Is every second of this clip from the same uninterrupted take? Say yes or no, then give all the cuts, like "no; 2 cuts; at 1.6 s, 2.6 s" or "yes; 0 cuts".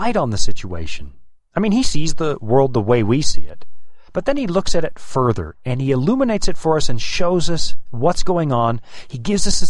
no; 1 cut; at 4.1 s